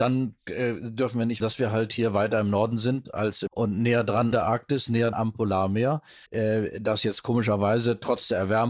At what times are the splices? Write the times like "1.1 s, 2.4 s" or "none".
1.4 s, 3.5 s, 4.3 s, 5.1 s, 6.3 s